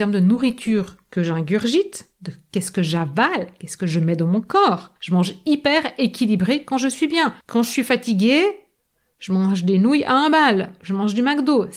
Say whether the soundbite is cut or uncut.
cut